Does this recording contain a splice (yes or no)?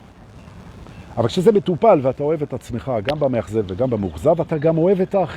no